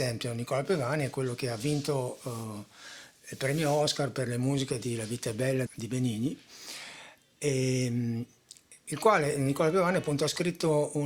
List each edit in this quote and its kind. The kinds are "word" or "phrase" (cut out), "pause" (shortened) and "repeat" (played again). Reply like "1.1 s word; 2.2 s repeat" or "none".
5.7 s word